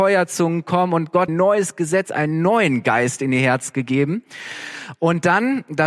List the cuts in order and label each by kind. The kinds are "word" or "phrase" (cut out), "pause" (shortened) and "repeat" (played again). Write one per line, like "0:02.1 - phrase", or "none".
0:01.3 - phrase